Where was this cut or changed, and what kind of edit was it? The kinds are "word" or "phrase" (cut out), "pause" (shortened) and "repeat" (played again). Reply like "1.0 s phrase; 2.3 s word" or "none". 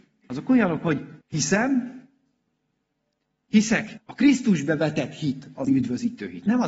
1.2 s pause; 4.0 s word; 5.7 s word

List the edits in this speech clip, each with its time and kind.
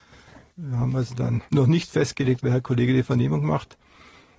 1.5 s pause

